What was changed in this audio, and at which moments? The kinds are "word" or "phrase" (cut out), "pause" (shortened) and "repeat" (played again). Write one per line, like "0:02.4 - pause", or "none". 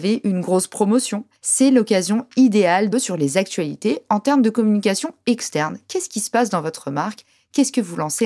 0:01.4 - pause
0:02.9 - phrase